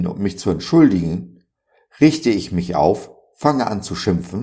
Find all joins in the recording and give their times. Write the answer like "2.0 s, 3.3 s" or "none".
none